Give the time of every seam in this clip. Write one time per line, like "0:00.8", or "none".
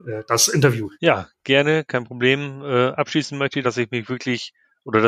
0:00.9
0:03.6